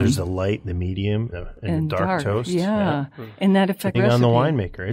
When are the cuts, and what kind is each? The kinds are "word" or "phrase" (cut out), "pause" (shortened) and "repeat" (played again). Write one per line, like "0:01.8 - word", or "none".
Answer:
0:01.3 - word
0:03.9 - word